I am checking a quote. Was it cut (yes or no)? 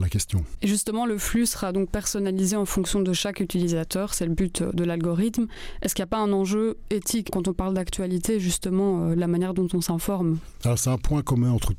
no